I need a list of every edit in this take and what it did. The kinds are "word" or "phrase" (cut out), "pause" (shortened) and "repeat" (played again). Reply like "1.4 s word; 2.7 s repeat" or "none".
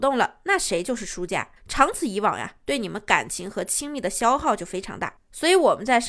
1.6 s pause